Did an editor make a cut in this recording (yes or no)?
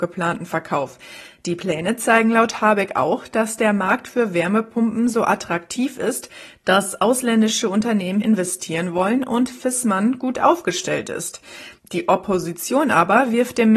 yes